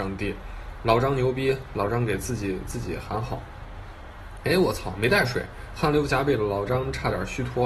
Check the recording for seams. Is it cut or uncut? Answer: uncut